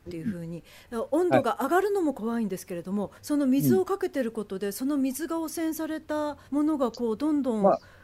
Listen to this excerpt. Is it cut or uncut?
cut